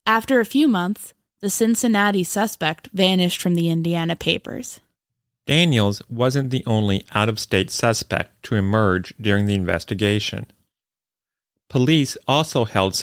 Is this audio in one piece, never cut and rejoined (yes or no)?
yes